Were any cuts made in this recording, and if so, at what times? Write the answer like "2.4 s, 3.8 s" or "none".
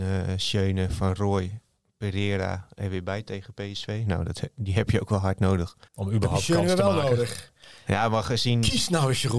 5.9 s